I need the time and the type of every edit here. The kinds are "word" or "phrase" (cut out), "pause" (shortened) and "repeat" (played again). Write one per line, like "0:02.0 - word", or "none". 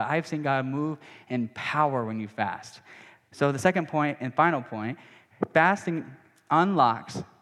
none

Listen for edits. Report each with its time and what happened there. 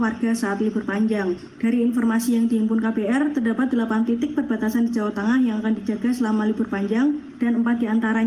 none

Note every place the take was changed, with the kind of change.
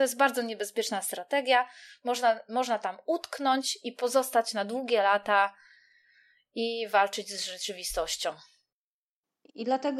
none

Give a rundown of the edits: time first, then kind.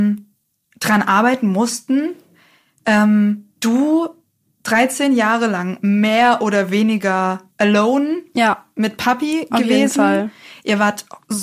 0:03.6 - pause
0:07.5 - pause

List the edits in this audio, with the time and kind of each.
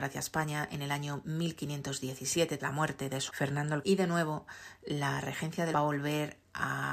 0:02.6 - word
0:03.3 - word
0:03.8 - word
0:05.7 - phrase

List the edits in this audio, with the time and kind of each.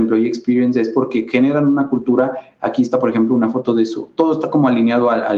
none

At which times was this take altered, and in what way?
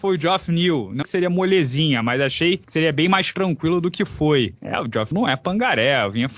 0:01.0 - word
0:05.1 - word

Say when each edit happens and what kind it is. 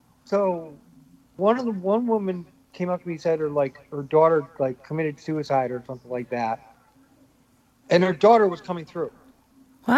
none

